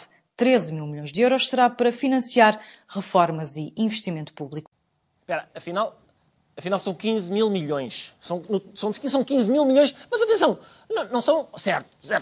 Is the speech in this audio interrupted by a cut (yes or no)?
no